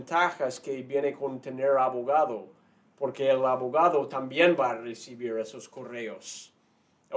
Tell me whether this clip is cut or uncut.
uncut